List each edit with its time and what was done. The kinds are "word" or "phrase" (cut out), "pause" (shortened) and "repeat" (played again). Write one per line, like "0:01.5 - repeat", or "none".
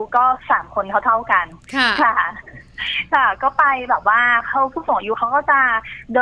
none